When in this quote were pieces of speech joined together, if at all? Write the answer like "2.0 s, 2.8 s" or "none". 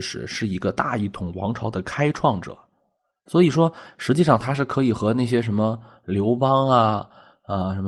none